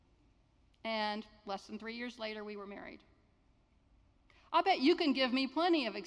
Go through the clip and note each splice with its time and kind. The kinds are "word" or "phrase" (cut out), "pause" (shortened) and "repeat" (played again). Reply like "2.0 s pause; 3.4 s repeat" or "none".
none